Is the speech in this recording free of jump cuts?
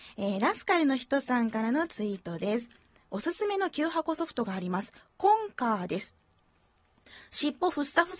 yes; 0 cuts

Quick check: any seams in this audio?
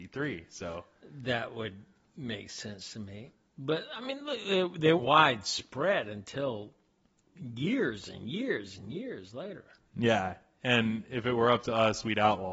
yes; 1 cut; at 5.0 s

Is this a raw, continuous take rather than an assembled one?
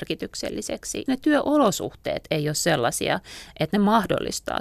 no; 1 cut; at 1.1 s

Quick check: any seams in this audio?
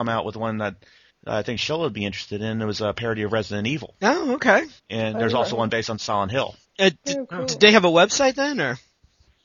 yes; 3 cuts; at 1.1 s, 4.8 s, 6.6 s

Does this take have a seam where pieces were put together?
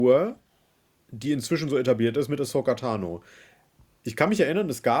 no; 0 cuts

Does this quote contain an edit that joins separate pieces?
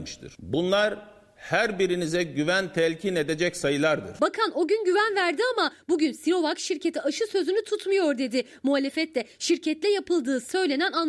no; 0 cuts

